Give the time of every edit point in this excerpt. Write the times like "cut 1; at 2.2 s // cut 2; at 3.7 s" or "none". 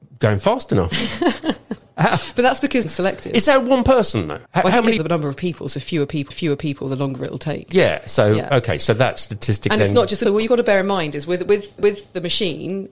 cut 1; at 2.8 s // cut 2; at 4.5 s // cut 3; at 5.0 s // cut 4; at 6.3 s // cut 5; at 10.3 s // cut 6; at 11.8 s